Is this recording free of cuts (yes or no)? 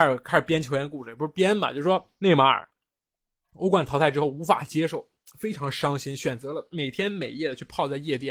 yes